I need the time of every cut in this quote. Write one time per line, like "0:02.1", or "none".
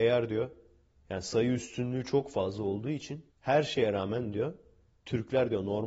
0:03.3